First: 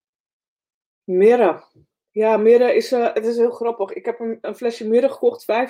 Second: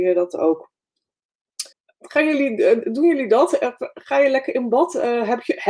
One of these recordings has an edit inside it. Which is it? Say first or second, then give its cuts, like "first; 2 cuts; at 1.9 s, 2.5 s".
second; 1 cut; at 1.7 s